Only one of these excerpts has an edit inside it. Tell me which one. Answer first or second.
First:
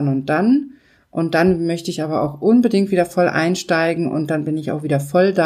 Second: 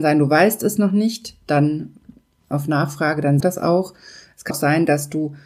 second